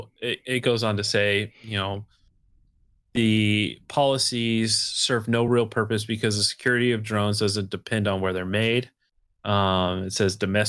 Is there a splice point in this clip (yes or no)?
no